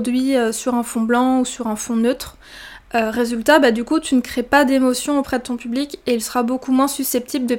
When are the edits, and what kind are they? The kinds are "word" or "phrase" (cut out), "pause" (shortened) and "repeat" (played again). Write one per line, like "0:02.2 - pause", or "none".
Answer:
none